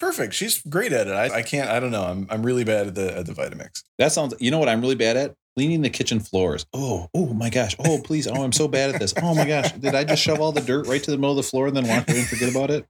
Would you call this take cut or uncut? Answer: cut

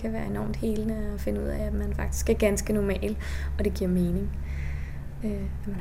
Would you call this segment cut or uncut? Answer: uncut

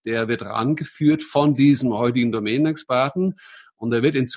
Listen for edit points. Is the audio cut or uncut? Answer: uncut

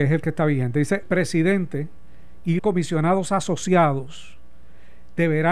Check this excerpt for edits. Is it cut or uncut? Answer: cut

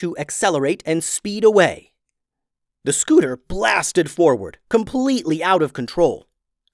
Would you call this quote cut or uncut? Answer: uncut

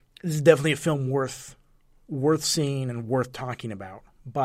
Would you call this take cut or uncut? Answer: uncut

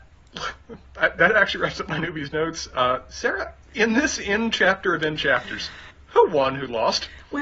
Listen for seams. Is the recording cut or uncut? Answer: cut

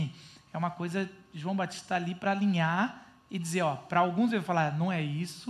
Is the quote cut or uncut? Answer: uncut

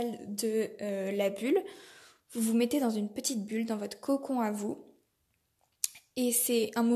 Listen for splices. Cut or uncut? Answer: uncut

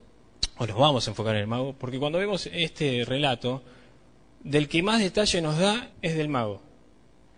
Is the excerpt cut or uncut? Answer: cut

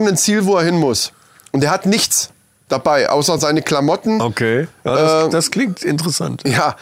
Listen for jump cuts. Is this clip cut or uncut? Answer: uncut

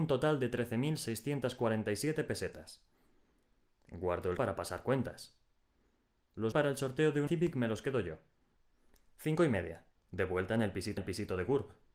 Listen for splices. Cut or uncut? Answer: cut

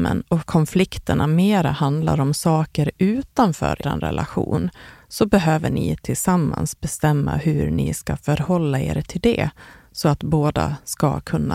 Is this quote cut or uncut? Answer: cut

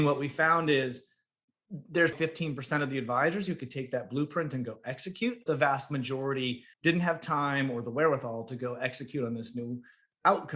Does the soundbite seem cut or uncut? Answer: cut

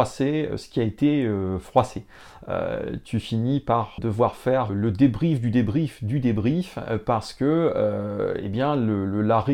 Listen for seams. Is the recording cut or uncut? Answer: cut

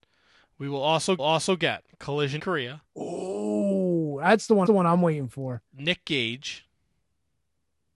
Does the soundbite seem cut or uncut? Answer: cut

